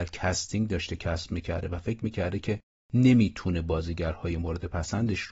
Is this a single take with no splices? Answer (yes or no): yes